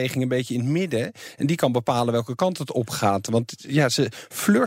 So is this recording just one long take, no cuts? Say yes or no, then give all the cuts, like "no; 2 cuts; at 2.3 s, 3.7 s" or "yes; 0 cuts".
yes; 0 cuts